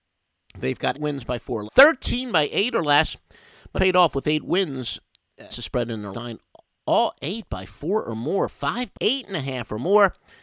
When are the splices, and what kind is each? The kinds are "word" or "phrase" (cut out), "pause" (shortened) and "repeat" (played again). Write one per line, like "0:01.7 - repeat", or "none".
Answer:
0:00.9 - word
0:01.7 - word
0:03.8 - word
0:05.5 - word
0:06.1 - word
0:08.9 - word